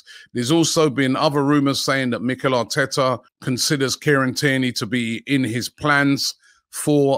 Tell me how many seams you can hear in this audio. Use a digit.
1